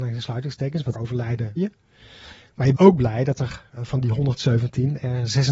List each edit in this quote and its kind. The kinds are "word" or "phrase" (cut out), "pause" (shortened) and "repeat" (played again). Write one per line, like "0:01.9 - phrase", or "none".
0:00.9 - word
0:01.6 - word
0:02.7 - word
0:03.8 - word